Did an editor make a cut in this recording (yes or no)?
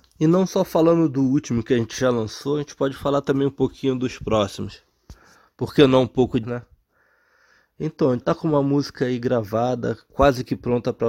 yes